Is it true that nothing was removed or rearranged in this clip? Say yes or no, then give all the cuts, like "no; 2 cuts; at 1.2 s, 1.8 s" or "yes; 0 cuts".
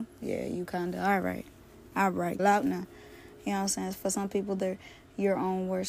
no; 1 cut; at 2.4 s